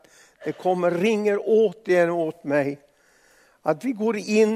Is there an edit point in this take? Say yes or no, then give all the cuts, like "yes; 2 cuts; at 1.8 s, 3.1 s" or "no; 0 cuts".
no; 0 cuts